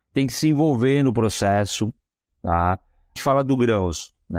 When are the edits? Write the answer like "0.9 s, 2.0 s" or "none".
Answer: 3.2 s